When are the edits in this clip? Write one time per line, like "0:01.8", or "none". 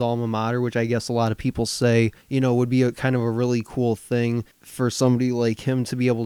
0:02.2
0:04.5